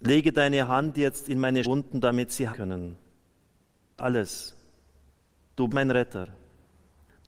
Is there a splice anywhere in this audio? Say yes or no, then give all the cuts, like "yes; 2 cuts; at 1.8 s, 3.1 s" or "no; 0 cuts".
yes; 4 cuts; at 1.6 s, 2.5 s, 4.0 s, 5.7 s